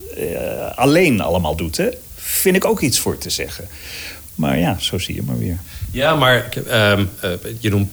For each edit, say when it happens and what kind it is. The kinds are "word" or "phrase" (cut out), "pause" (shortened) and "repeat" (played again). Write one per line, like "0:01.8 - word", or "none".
none